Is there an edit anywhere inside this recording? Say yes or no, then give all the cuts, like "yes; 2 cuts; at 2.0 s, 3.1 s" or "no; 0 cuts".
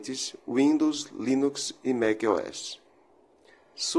no; 0 cuts